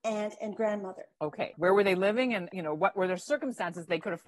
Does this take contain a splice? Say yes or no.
yes